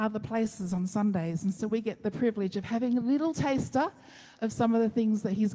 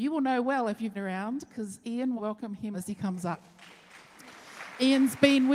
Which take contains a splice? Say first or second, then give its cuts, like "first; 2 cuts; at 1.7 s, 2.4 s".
second; 3 cuts; at 0.9 s, 2.2 s, 2.7 s